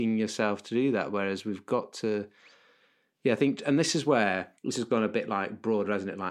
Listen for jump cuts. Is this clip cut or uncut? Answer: cut